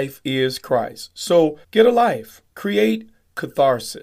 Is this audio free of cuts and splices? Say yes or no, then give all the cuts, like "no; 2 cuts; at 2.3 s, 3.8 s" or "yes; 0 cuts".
no; 2 cuts; at 1.6 s, 2.5 s